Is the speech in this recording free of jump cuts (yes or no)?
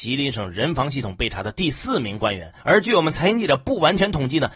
no